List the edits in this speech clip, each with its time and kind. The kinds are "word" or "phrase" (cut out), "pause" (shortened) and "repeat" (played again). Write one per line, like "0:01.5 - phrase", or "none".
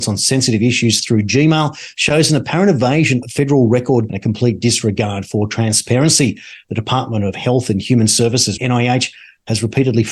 0:03.2 - word
0:04.1 - phrase
0:08.6 - phrase

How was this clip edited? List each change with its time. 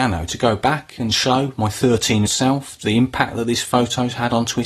0:02.3 - word

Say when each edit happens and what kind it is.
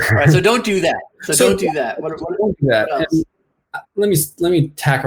0:01.1 - pause
0:03.8 - word

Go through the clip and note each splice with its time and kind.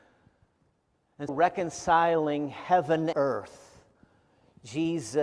0:01.3 - word
0:03.1 - word

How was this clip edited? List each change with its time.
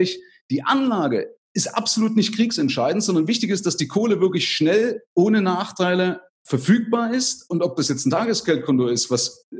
0:06.3 - pause

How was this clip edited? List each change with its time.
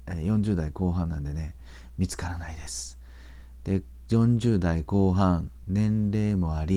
none

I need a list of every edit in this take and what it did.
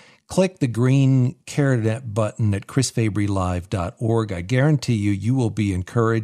none

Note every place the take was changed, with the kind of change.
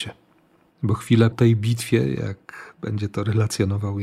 0:01.3 - word

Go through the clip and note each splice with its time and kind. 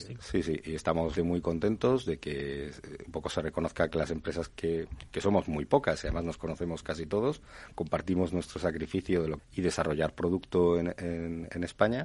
0:01.2 - word
0:04.5 - word
0:09.4 - phrase

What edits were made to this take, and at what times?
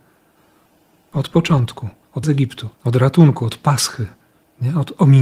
0:02.2 - word
0:02.7 - pause

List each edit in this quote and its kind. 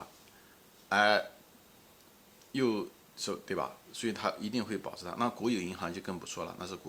none

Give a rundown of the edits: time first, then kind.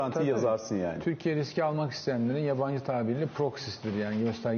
none

